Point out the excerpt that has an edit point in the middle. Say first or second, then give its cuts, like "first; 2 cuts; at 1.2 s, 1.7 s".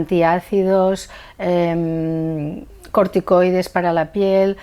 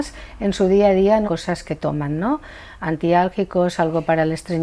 second; 1 cut; at 1.2 s